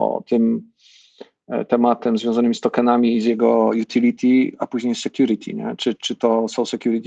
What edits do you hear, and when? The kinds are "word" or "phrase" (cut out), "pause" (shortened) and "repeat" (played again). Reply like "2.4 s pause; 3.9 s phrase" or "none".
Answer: 5.9 s word

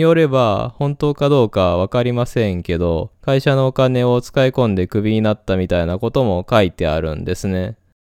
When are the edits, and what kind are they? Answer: 3.2 s pause

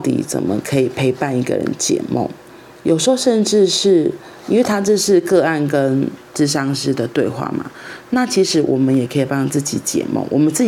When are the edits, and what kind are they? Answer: none

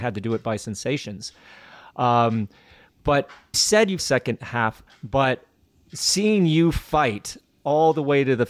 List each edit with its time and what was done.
3.5 s word; 4.0 s phrase; 4.9 s phrase

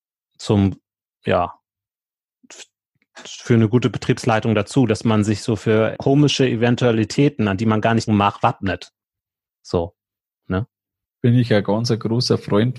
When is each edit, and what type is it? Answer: 6.0 s word; 8.1 s word

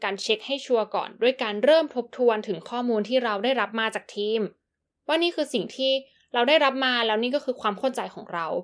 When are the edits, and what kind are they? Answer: none

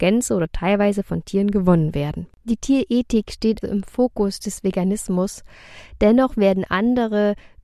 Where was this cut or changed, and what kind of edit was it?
3.6 s word

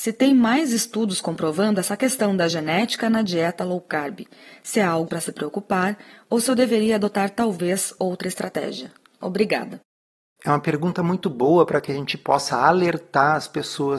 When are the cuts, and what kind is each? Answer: 5.1 s word

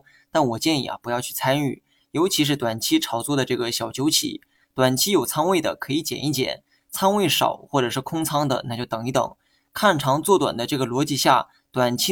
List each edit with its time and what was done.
none

